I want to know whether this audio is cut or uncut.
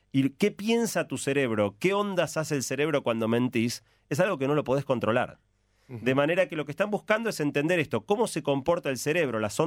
uncut